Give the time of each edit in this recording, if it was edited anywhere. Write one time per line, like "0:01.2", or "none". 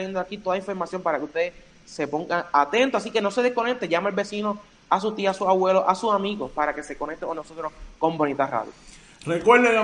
none